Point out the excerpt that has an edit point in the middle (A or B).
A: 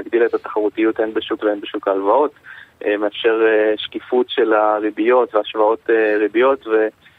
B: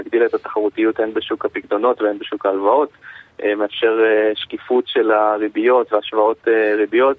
A